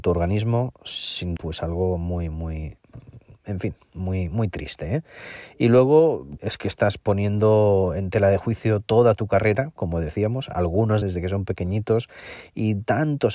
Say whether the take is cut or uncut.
cut